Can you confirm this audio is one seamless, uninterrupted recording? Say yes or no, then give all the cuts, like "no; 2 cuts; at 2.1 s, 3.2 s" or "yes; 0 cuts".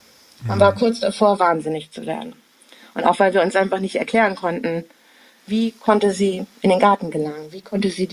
yes; 0 cuts